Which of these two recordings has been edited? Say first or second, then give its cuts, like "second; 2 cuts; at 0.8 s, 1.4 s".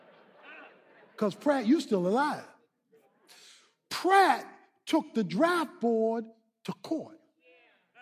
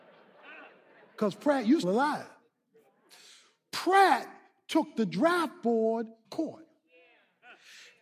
second; 2 cuts; at 1.8 s, 6.2 s